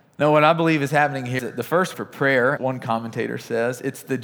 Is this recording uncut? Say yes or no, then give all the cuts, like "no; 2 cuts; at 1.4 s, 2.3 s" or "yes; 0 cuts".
no; 3 cuts; at 1.4 s, 1.9 s, 2.6 s